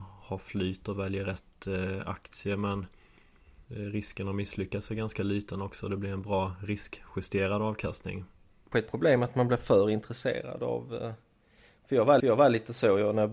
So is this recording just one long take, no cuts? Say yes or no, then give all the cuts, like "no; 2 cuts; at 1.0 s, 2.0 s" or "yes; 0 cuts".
no; 3 cuts; at 3.7 s, 8.7 s, 12.2 s